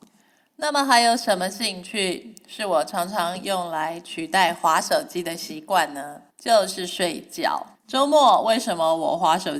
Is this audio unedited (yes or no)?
no